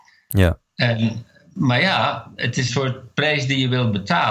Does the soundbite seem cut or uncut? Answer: cut